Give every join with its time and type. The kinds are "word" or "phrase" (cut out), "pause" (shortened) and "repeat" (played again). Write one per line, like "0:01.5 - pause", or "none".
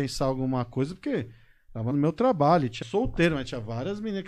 0:01.9 - phrase
0:02.8 - phrase